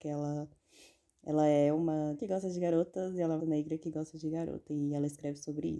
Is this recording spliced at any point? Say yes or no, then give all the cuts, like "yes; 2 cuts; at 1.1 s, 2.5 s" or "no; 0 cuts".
yes; 2 cuts; at 2.1 s, 3.4 s